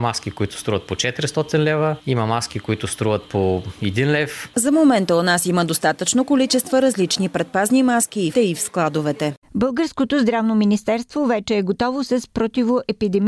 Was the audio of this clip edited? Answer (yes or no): yes